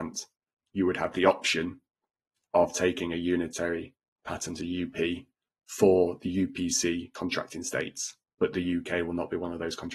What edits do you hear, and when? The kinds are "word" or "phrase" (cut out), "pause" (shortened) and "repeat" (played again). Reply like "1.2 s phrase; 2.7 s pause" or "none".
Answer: none